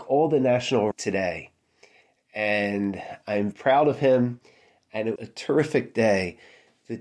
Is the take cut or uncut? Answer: cut